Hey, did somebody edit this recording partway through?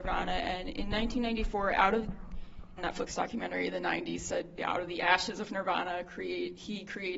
yes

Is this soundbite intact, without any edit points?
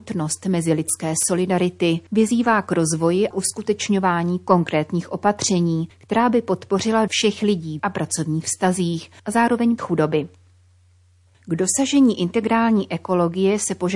no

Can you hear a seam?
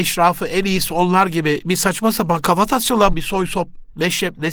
yes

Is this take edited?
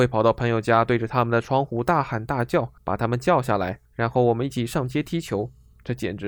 yes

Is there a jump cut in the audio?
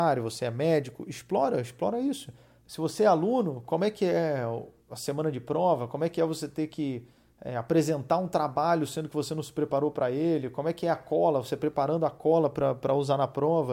yes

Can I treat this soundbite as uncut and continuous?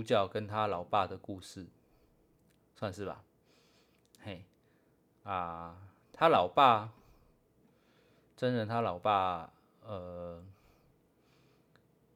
yes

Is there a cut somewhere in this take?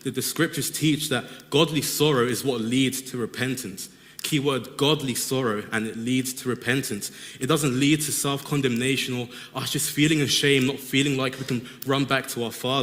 no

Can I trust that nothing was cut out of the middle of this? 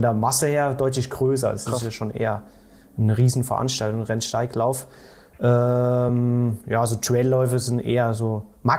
yes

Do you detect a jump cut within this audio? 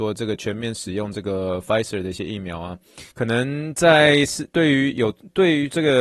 yes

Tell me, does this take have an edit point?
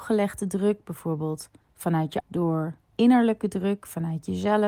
yes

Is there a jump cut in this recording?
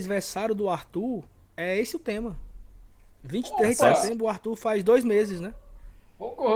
no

